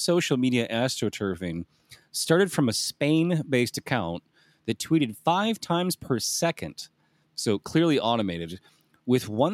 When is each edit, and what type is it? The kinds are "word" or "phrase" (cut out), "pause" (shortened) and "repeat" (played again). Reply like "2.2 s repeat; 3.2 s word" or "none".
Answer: none